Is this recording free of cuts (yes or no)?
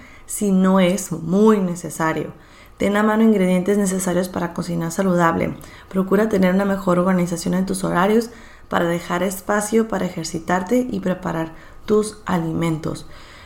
yes